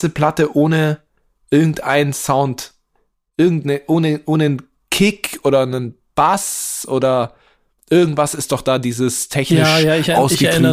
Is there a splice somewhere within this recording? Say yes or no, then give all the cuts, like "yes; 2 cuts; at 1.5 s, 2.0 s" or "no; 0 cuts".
no; 0 cuts